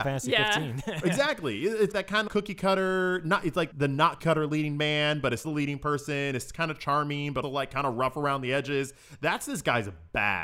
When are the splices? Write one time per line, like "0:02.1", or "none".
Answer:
0:01.9
0:02.3
0:03.7
0:04.2
0:05.4
0:07.4

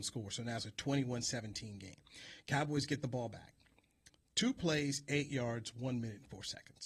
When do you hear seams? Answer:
none

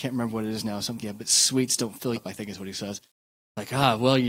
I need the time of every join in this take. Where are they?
0:01.0
0:02.2

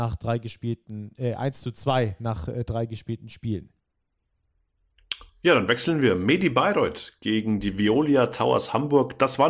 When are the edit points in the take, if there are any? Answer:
none

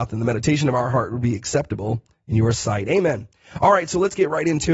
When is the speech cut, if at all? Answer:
none

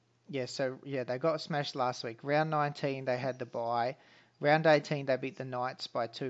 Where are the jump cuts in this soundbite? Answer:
none

